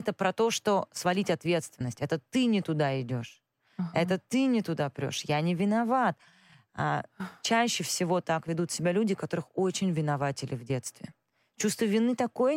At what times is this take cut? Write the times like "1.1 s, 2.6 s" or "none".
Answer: none